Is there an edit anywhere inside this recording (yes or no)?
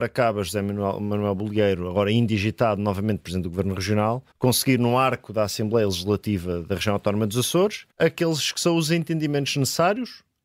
yes